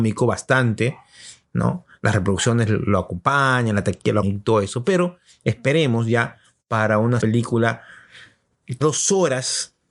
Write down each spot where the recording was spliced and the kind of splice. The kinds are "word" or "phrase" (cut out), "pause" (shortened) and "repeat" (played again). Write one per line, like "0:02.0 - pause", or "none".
0:04.2 - word
0:07.2 - word
0:08.8 - word